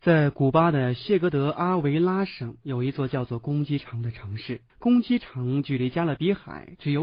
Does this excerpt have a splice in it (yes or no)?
yes